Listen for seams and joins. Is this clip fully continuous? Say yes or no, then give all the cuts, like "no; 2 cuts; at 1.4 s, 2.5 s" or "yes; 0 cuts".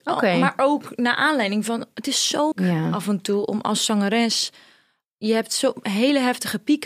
no; 1 cut; at 2.5 s